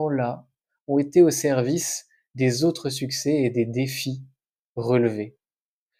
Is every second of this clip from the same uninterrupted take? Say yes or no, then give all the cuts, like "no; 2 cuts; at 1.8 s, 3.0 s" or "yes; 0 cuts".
yes; 0 cuts